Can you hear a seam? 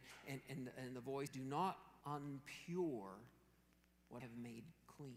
yes; 3 cuts; at 1.3 s, 2.0 s, 4.2 s

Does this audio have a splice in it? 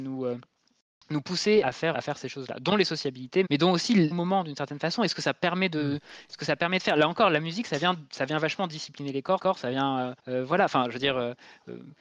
yes; 6 cuts; at 1.6 s, 1.9 s, 3.5 s, 4.1 s, 9.4 s, 10.2 s

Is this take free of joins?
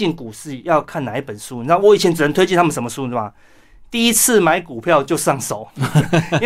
yes; 0 cuts

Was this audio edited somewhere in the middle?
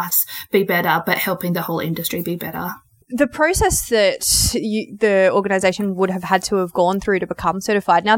no; 0 cuts

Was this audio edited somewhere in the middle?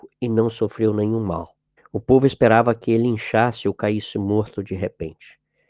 yes; 1 cut; at 1.8 s

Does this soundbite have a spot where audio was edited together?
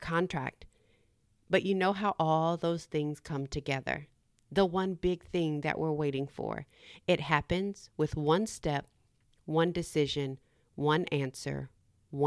no; 0 cuts

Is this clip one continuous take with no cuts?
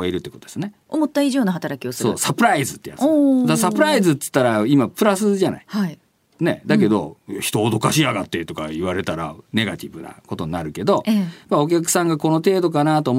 yes; 0 cuts

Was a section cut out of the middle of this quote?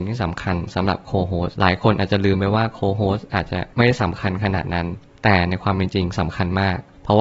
yes; 2 cuts; at 1.5 s, 3.7 s

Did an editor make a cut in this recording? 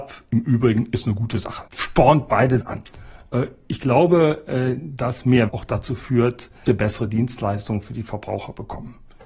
yes; 3 cuts; at 2.6 s, 5.5 s, 6.7 s

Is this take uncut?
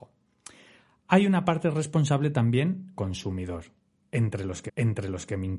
no; 2 cuts; at 3.0 s, 4.7 s

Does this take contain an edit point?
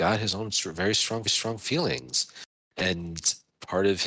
yes; 1 cut; at 1.3 s

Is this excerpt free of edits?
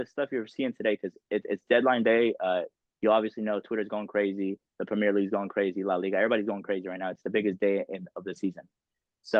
no; 1 cut; at 2.8 s

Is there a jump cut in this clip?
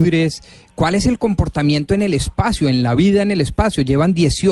no; 0 cuts

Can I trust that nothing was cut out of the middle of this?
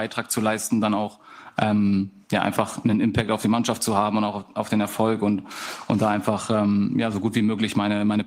yes; 0 cuts

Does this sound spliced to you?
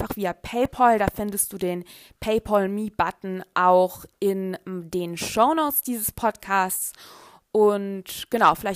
no; 0 cuts

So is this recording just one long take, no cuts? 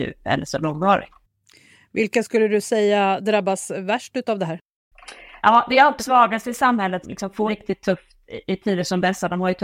no; 3 cuts; at 6.0 s, 7.0 s, 7.5 s

